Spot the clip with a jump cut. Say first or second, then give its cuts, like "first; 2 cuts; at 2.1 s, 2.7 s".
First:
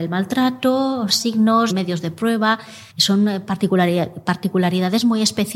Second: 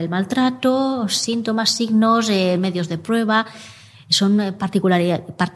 first; 3 cuts; at 1.1 s, 1.7 s, 2.9 s